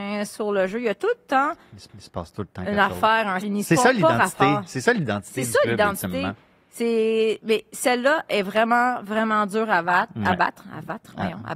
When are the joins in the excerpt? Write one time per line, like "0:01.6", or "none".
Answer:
0:01.9
0:03.4